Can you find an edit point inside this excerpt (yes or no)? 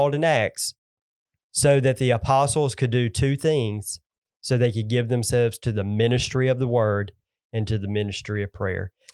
no